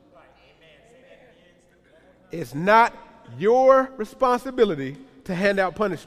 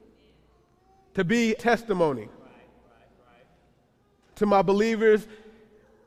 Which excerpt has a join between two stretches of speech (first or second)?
second